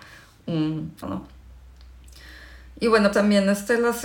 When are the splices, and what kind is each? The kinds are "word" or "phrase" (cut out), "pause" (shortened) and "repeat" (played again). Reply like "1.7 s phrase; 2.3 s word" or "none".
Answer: 1.0 s phrase; 3.1 s word

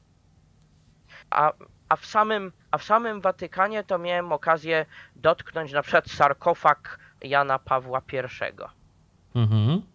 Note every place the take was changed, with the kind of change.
1.2 s pause; 2.6 s pause; 7.2 s word

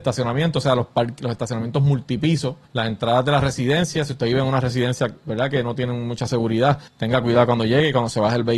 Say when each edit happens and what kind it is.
2.6 s pause; 6.9 s pause

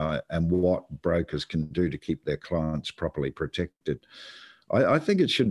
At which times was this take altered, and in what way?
none

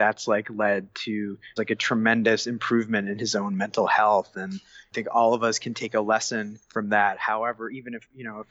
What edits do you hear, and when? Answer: 1.6 s word; 6.6 s pause

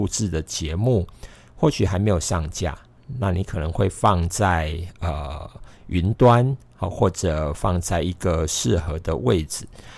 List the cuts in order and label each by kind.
none

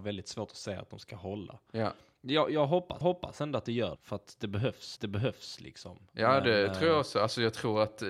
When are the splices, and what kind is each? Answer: 0.9 s phrase; 3.0 s repeat; 4.0 s word; 5.0 s repeat

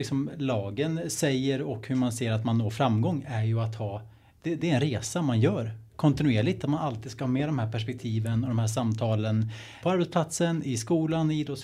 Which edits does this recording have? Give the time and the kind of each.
4.6 s word; 9.8 s word

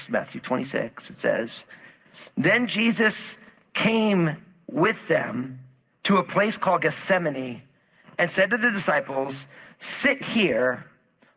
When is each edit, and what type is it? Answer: none

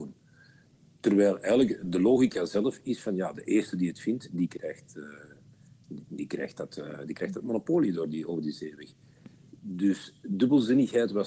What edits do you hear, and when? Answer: none

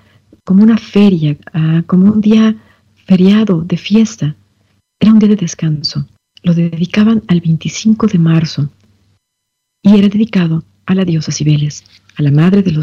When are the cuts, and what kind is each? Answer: 6.2 s pause

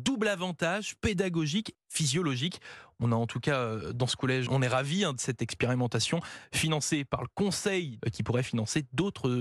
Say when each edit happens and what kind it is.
1.7 s word; 4.5 s word; 8.0 s word

